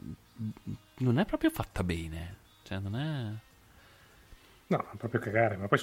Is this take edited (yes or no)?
no